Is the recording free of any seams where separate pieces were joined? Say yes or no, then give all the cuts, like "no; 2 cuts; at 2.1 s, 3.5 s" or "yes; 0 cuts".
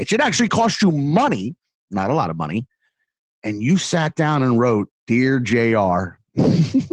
yes; 0 cuts